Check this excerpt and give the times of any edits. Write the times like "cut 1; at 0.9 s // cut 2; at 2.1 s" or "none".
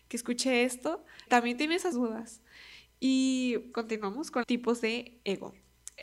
cut 1; at 1.3 s // cut 2; at 1.9 s // cut 3; at 3.7 s // cut 4; at 4.4 s